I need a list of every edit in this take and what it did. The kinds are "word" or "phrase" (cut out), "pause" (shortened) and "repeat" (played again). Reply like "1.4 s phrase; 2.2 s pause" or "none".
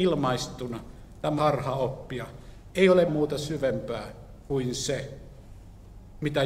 1.4 s phrase; 3.1 s word